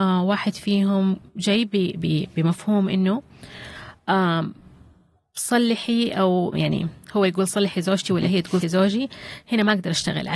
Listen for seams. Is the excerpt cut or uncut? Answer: cut